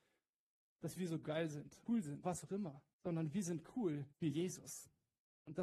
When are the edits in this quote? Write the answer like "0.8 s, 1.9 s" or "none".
1.9 s, 2.2 s, 2.9 s, 4.1 s